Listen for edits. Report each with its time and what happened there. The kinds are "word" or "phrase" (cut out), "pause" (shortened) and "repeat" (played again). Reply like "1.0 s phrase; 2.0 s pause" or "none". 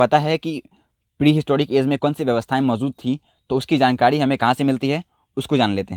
2.0 s word